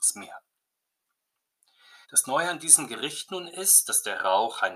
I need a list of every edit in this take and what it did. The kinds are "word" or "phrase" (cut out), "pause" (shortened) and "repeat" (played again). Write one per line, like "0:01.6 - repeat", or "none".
0:02.0 - pause